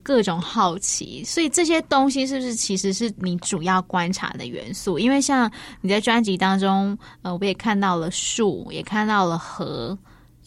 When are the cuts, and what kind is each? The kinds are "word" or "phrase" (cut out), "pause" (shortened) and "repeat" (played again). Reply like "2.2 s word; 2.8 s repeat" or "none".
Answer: none